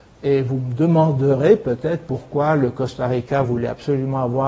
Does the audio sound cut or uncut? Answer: uncut